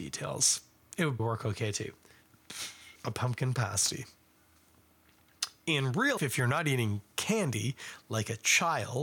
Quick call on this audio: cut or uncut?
cut